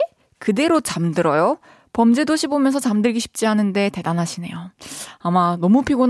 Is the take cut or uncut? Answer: uncut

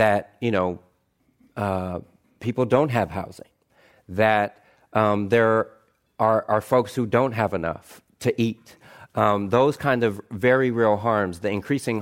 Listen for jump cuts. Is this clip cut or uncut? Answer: uncut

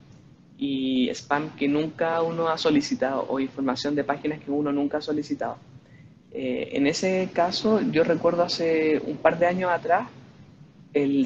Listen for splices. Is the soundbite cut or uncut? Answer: uncut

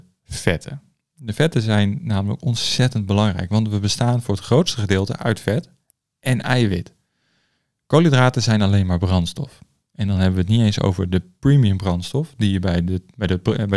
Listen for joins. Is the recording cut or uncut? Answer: uncut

